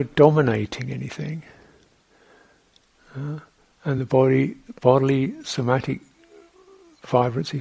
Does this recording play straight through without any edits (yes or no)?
yes